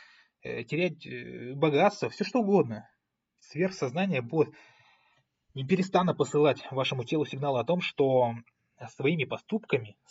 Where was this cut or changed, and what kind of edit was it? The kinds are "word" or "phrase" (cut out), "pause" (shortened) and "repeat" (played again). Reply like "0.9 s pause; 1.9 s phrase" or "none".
none